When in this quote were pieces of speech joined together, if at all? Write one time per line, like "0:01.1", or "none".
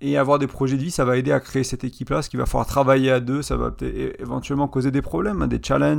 none